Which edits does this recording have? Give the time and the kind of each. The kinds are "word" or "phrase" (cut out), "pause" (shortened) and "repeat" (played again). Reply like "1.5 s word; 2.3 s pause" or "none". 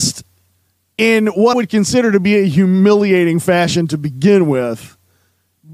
1.5 s word